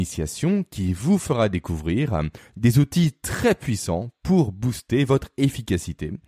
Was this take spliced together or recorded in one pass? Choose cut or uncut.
uncut